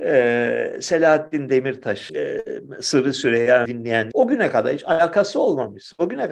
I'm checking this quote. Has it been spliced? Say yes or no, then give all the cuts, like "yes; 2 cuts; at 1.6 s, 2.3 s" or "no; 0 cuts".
yes; 3 cuts; at 2.1 s, 3.6 s, 4.1 s